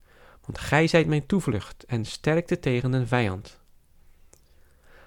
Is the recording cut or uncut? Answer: uncut